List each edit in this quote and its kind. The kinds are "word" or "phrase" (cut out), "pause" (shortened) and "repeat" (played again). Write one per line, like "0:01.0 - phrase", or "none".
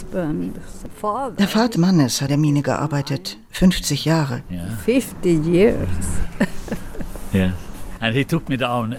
0:01.8 - word
0:02.3 - word